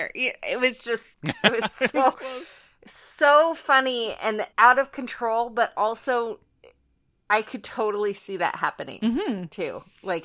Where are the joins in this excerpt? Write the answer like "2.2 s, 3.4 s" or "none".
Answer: 1.1 s, 2.1 s, 4.5 s